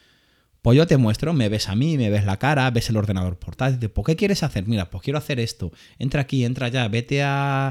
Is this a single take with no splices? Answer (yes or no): yes